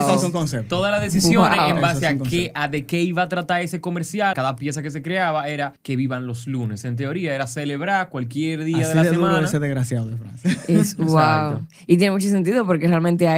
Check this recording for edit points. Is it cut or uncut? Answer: cut